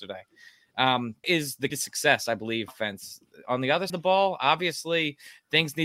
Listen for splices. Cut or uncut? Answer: cut